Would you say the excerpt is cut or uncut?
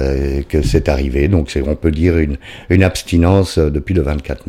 uncut